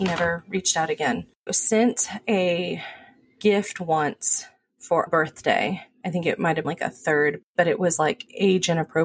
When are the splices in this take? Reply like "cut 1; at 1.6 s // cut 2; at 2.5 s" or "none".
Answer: cut 1; at 1.5 s // cut 2; at 5.1 s // cut 3; at 6.6 s // cut 4; at 7.4 s